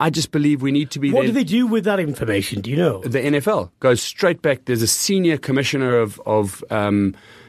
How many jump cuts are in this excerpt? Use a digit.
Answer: 0